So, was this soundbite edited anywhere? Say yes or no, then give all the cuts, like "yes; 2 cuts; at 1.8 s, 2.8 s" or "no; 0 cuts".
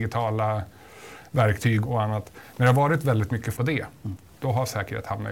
yes; 2 cuts; at 1.8 s, 3.5 s